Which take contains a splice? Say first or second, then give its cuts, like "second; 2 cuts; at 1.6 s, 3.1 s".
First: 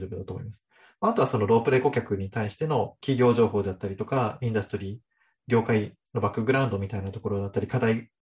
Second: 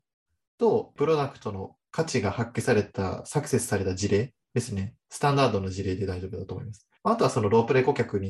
second; 2 cuts; at 4.4 s, 7.0 s